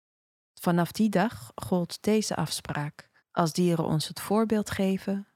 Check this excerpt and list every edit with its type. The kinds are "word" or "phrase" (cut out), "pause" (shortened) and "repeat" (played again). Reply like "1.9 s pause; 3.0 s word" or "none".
3.2 s pause